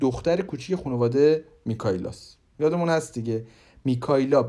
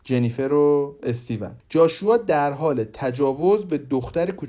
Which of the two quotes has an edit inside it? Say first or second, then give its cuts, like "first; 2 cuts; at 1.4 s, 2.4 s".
second; 1 cut; at 1.6 s